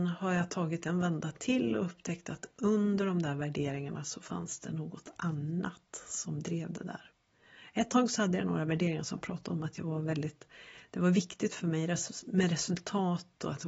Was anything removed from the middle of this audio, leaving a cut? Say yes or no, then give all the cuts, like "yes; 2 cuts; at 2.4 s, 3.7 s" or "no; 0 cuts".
no; 0 cuts